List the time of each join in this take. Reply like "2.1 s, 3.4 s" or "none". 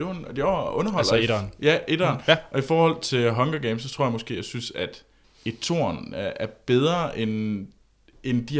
5.2 s